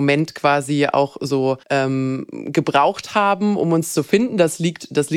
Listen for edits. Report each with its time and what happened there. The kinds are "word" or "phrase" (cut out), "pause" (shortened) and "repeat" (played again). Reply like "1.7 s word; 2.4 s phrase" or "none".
1.6 s pause

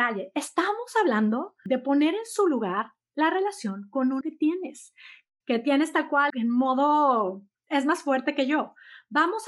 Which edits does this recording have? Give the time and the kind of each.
4.2 s word; 6.3 s word

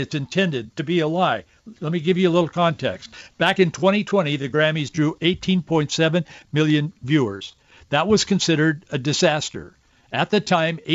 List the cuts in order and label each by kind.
none

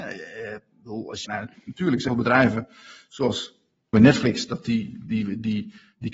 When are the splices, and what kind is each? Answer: 1.3 s phrase; 2.1 s word; 3.9 s phrase

